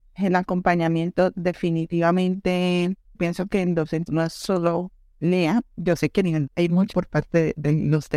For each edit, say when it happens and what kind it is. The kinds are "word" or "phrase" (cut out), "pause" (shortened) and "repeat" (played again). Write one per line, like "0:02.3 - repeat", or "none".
0:03.1 - word
0:04.1 - word
0:06.5 - word
0:06.9 - word